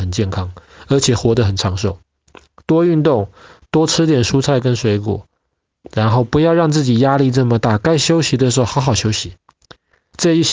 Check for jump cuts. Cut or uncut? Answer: uncut